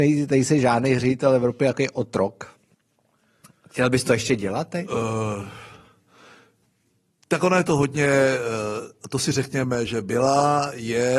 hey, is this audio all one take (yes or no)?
yes